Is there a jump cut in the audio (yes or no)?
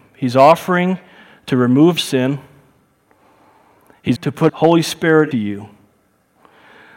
yes